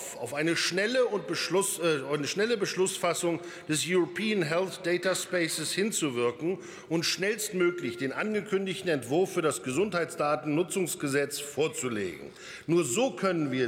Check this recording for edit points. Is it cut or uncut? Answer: uncut